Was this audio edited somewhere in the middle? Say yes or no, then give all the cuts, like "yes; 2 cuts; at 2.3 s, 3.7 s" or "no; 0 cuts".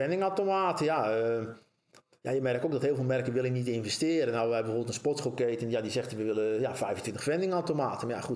no; 0 cuts